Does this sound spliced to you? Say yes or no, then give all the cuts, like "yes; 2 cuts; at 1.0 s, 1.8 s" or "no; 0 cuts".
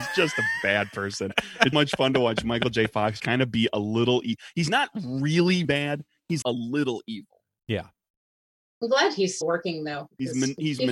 yes; 5 cuts; at 1.7 s, 3.2 s, 5.6 s, 6.4 s, 9.4 s